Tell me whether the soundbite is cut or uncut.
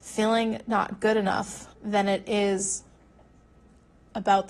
cut